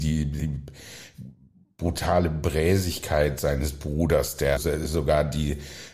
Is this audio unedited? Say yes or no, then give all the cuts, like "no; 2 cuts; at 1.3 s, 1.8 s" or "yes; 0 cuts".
no; 1 cut; at 4.6 s